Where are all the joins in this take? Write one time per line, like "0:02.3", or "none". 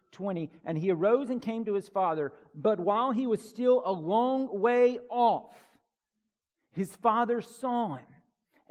none